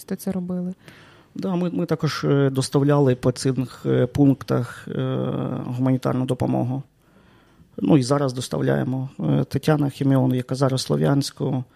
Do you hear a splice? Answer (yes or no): no